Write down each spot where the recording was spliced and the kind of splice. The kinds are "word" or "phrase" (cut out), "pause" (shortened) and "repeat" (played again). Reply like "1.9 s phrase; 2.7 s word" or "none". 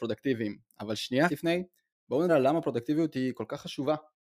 1.3 s word; 2.3 s word